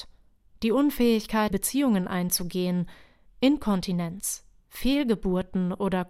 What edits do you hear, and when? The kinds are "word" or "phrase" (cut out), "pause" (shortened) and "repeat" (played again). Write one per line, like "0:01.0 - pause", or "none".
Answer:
0:01.5 - word